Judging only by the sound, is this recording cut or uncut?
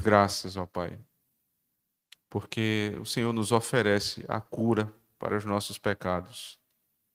uncut